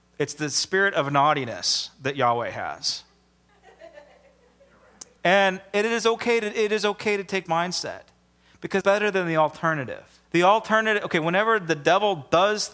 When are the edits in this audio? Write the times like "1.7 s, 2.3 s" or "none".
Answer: 5.2 s, 7.5 s, 8.8 s, 10.2 s